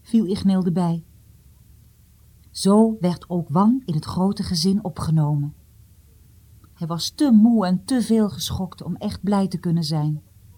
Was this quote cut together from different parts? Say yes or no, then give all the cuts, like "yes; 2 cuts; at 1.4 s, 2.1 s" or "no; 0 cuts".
no; 0 cuts